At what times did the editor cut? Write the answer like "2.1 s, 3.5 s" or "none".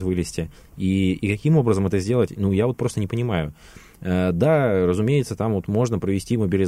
none